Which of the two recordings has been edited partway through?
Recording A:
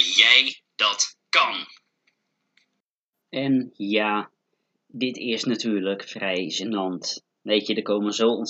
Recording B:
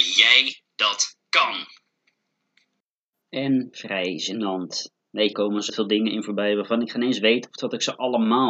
B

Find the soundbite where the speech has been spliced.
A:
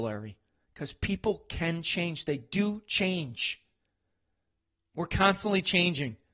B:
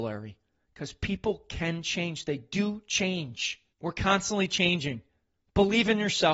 B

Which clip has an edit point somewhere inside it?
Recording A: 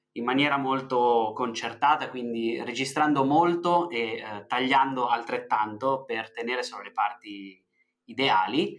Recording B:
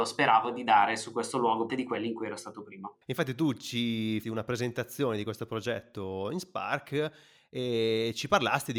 B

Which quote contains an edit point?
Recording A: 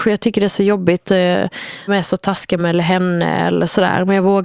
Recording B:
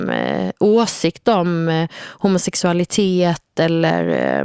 A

